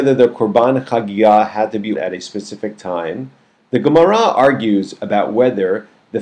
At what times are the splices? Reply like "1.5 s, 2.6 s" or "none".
1.9 s